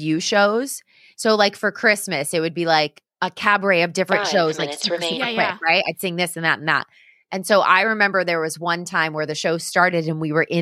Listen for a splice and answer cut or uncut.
uncut